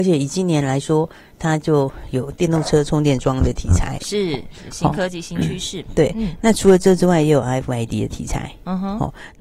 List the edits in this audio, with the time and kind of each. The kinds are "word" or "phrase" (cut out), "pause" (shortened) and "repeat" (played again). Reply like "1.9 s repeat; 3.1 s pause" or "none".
none